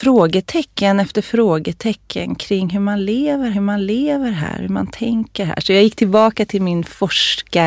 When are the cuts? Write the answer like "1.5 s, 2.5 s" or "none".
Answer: 3.5 s

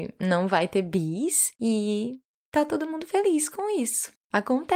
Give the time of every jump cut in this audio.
1.5 s

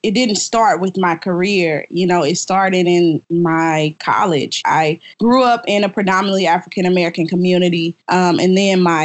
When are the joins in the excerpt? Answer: 3.2 s, 5.1 s, 8.0 s

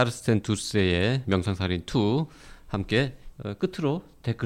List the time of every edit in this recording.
1.2 s, 3.3 s

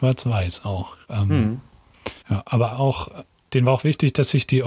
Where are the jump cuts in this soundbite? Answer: 1.0 s, 2.2 s, 2.7 s, 3.5 s

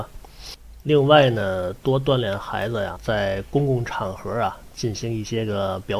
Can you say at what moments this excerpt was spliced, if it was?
2.9 s

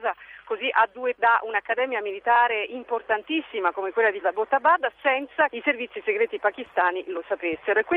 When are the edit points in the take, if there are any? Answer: 1.2 s, 4.2 s, 5.5 s

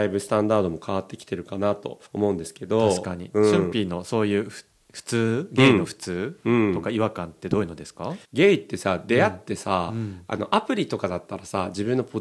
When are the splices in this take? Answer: 2.1 s, 8.2 s

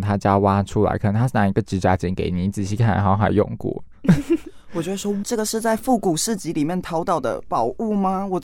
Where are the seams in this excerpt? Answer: 5.2 s

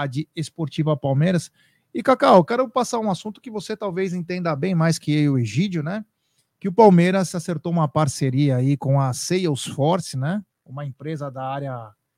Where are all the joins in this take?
10.5 s

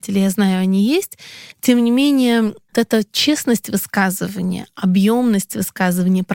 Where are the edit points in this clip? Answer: 1.5 s, 2.7 s

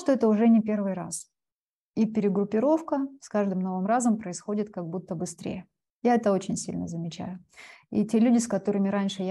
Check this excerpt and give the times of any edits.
none

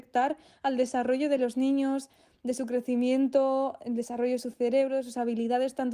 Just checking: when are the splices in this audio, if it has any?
none

